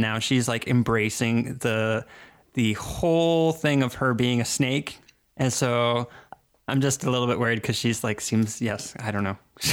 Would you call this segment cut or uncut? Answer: uncut